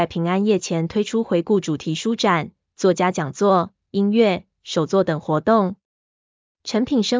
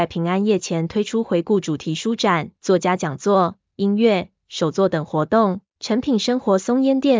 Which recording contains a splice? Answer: second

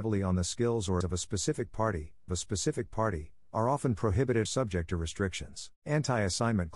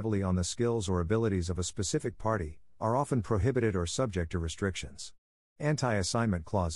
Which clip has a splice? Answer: first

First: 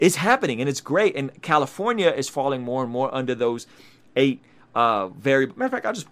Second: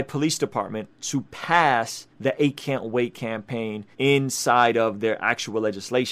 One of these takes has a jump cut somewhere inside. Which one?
second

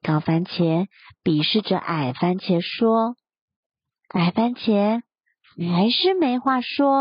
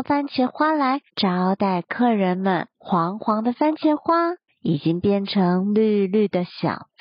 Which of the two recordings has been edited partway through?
second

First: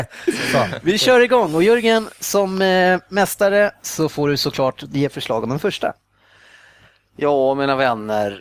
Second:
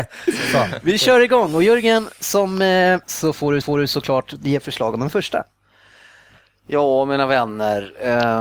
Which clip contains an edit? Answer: second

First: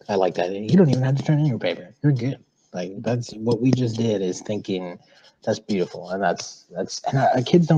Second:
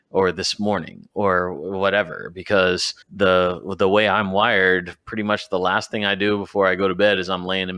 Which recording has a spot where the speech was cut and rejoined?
second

